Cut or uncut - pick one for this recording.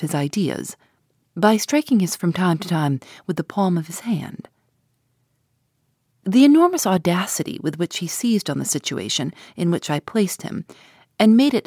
cut